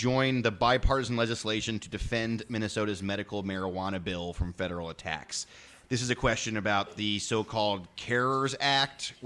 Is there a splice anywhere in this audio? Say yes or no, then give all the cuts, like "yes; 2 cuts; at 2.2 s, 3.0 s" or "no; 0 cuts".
no; 0 cuts